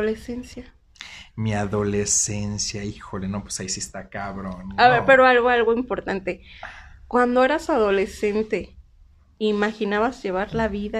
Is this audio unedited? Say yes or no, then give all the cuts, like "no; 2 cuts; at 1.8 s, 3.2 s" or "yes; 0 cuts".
yes; 0 cuts